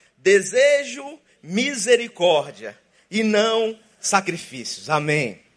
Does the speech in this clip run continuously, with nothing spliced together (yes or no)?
yes